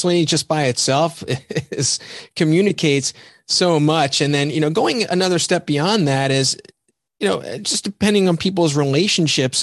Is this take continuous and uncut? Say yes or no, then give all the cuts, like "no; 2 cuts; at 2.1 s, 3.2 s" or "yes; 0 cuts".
yes; 0 cuts